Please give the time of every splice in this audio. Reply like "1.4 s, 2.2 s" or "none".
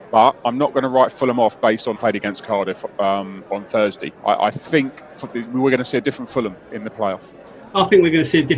2.0 s, 3.5 s, 4.2 s